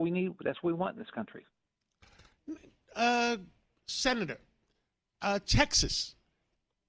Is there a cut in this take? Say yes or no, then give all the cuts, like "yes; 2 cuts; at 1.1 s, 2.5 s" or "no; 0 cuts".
no; 0 cuts